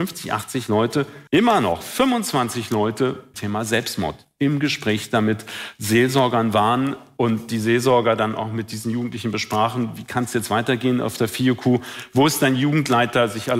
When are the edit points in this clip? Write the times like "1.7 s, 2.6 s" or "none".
1.3 s, 3.3 s

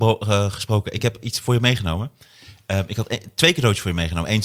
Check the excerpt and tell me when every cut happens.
none

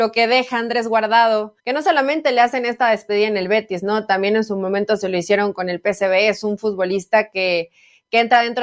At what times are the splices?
1.6 s

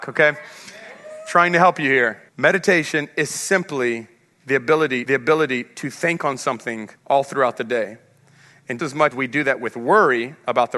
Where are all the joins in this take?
2.3 s, 5.0 s, 7.0 s, 8.8 s, 9.1 s

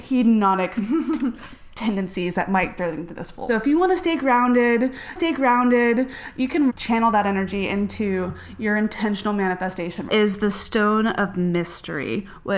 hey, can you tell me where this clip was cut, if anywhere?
2.8 s, 3.5 s, 5.2 s, 6.7 s, 10.1 s

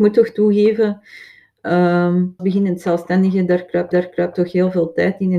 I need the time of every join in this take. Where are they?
2.4 s, 3.9 s

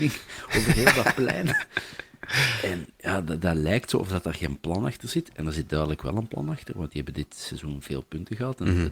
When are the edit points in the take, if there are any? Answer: none

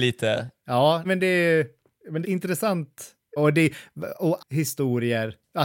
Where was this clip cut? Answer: 1.0 s, 2.2 s, 3.4 s, 4.4 s

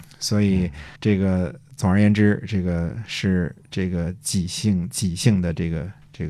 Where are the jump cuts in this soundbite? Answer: 1.0 s

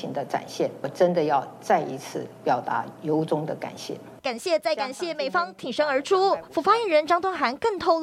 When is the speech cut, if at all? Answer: 2.3 s, 4.2 s

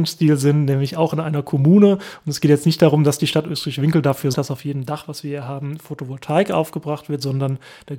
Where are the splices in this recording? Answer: 4.3 s

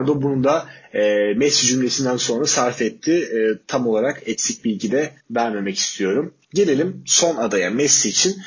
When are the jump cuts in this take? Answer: 5.2 s, 6.4 s

